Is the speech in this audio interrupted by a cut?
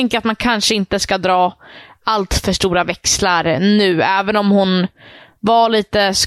no; 0 cuts

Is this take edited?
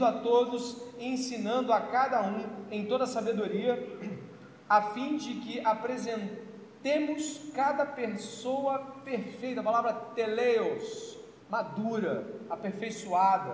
yes; 1 cut; at 11.4 s

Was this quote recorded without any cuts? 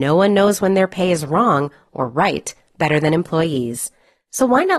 yes; 0 cuts

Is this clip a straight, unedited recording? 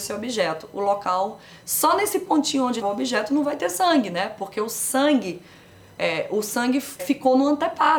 no; 2 cuts; at 2.8 s, 7.0 s

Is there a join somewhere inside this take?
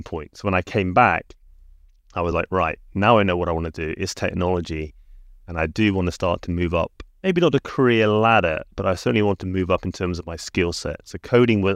no; 0 cuts

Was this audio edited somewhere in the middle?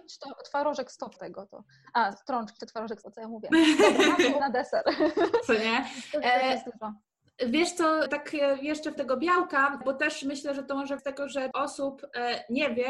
yes; 9 cuts; at 1.2 s, 2.6 s, 3.0 s, 4.4 s, 8.1 s, 9.0 s, 9.8 s, 11.0 s, 11.5 s

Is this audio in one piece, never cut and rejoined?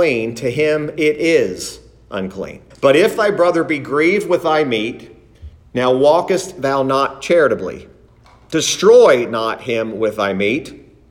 no; 1 cut; at 2.7 s

